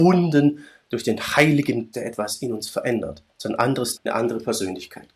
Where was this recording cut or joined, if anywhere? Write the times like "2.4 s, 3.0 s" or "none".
1.9 s, 3.3 s, 4.0 s